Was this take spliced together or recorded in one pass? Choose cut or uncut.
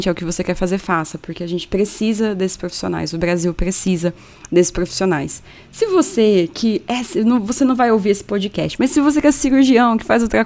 cut